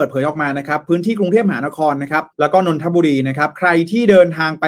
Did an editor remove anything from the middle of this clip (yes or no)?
yes